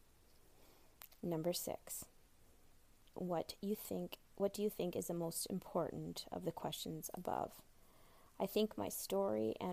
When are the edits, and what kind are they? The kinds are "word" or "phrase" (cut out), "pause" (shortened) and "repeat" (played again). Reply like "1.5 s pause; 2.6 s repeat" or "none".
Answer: none